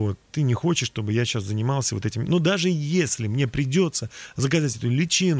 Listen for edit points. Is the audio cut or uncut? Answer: uncut